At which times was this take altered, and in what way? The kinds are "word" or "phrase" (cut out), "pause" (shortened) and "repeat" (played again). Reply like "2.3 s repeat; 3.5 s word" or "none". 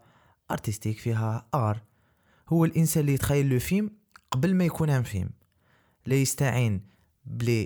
none